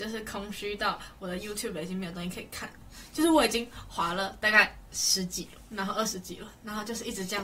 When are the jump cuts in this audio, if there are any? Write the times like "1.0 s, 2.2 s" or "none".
none